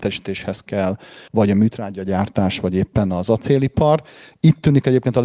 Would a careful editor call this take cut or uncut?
cut